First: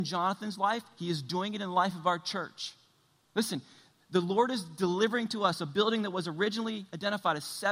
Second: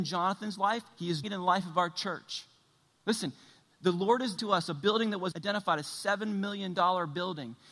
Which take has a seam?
second; 3 cuts; at 1.2 s, 4.4 s, 5.3 s

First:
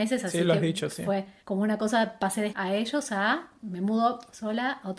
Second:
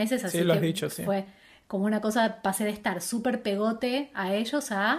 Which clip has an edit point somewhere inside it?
first; 2 cuts; at 1.4 s, 2.5 s

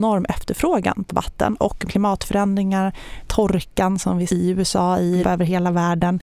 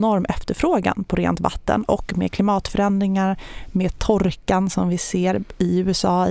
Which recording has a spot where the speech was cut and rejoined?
first; 5 cuts; at 1.1 s, 1.9 s, 3.2 s, 4.3 s, 5.2 s

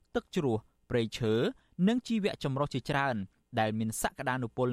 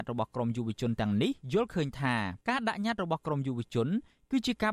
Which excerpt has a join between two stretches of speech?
second; 1 cut; at 2.4 s

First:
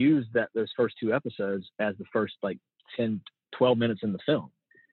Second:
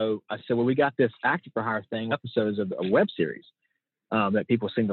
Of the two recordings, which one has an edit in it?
second; 1 cut; at 2.1 s

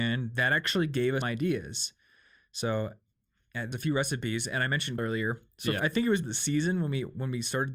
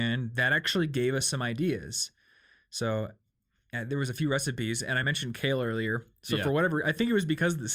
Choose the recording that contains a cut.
first; 5 cuts; at 1.2 s, 3.7 s, 5.0 s, 5.8 s, 6.2 s

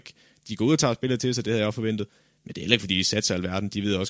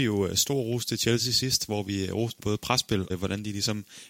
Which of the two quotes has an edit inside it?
second; 2 cuts; at 2.4 s, 3.1 s

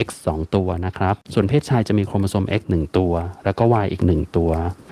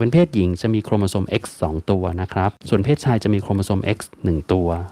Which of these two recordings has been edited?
first; 1 cut; at 2.6 s

